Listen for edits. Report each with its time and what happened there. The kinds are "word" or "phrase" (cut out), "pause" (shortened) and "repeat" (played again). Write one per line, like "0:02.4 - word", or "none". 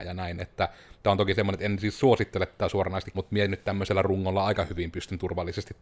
0:03.1 - word